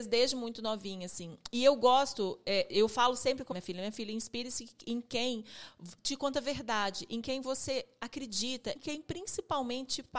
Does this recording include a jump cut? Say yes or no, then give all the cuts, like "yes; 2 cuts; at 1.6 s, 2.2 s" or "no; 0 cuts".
yes; 3 cuts; at 3.5 s, 6.0 s, 8.8 s